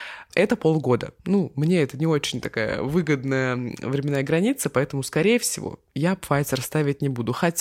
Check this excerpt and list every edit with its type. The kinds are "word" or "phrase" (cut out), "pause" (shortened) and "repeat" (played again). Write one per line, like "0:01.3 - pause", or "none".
none